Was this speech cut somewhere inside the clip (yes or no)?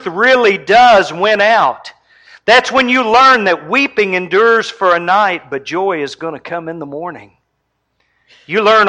no